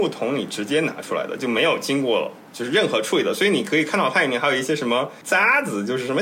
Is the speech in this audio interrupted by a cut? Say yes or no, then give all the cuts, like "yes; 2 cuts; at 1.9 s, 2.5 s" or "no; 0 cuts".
yes; 1 cut; at 5.2 s